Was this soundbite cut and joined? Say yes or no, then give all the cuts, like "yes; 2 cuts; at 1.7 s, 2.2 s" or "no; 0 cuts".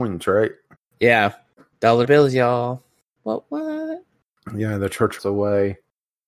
yes; 2 cuts; at 2.0 s, 5.2 s